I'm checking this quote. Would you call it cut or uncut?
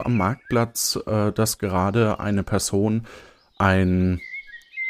uncut